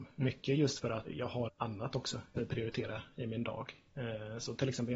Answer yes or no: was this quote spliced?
yes